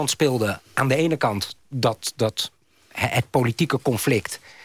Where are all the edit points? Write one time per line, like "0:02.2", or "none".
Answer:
none